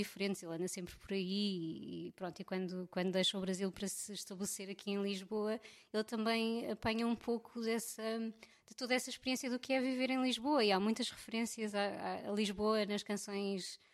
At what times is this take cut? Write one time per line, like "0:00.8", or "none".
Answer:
none